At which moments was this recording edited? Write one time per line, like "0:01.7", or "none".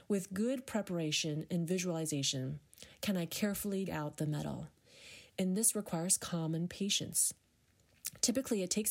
0:03.9